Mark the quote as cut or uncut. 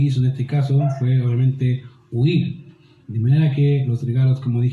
uncut